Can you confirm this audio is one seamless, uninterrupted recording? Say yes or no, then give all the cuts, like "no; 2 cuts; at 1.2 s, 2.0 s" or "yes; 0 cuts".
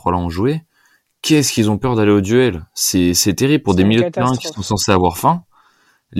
yes; 0 cuts